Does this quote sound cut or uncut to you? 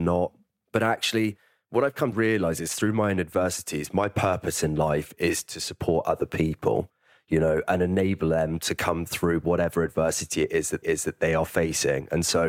cut